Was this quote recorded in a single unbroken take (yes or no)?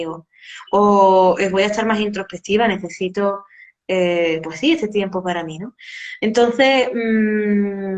yes